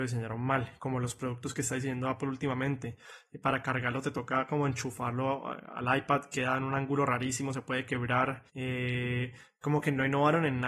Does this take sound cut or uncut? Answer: cut